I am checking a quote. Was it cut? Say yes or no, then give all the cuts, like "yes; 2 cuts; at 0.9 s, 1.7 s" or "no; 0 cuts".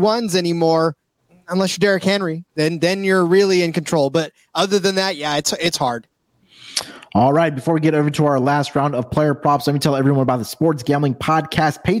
yes; 2 cuts; at 1.2 s, 2.5 s